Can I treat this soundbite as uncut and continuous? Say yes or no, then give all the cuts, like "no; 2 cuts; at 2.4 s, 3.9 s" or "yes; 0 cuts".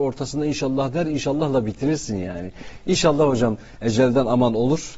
yes; 0 cuts